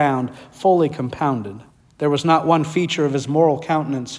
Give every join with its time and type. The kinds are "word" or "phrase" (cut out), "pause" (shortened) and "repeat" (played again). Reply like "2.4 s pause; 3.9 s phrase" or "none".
1.7 s pause